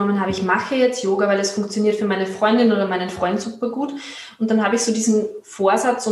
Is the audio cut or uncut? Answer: uncut